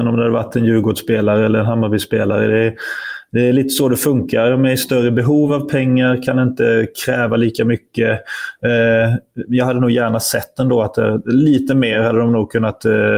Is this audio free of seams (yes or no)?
yes